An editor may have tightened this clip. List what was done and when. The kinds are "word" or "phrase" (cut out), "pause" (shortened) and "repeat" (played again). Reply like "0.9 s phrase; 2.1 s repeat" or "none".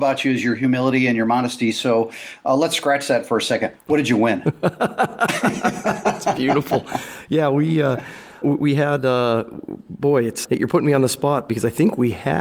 8.4 s word; 10.4 s word